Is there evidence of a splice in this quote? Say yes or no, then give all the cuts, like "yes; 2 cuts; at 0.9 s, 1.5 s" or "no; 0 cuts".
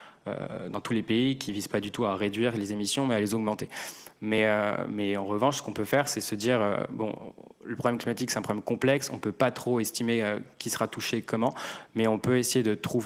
no; 0 cuts